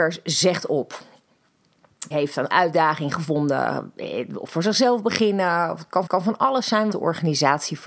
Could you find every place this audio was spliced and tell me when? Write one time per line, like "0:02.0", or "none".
0:02.1
0:02.5
0:04.5
0:06.1
0:06.9